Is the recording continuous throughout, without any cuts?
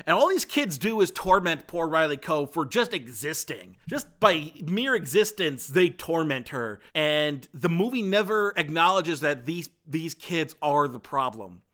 no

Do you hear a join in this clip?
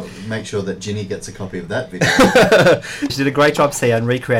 yes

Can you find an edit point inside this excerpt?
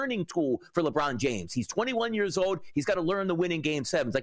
no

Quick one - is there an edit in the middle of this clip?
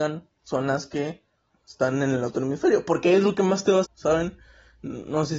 yes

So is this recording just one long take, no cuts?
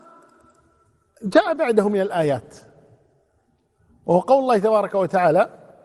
yes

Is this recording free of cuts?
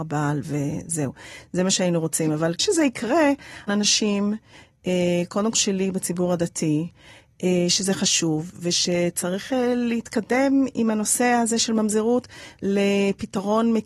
no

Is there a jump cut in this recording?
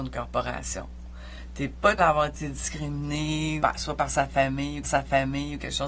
yes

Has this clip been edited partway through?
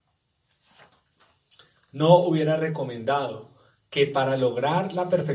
no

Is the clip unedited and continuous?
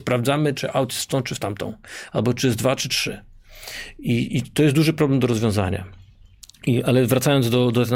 yes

